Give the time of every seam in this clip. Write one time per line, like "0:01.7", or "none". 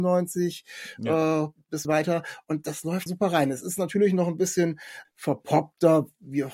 0:01.8
0:03.1
0:05.0